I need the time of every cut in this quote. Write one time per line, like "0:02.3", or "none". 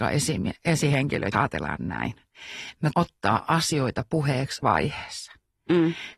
0:01.3
0:02.9
0:04.6